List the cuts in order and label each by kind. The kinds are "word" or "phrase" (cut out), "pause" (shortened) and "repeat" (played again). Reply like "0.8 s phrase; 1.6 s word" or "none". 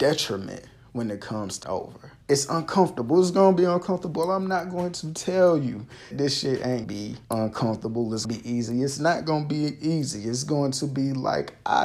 1.6 s word; 2.2 s pause; 6.1 s word; 6.8 s word; 7.2 s pause; 8.2 s word